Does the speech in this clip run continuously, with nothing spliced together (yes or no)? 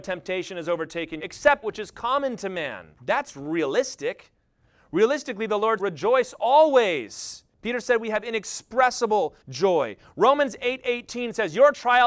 no